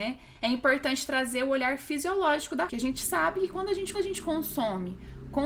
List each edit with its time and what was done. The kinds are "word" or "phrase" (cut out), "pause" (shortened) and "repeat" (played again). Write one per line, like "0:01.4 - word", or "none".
0:02.7 - phrase
0:03.9 - repeat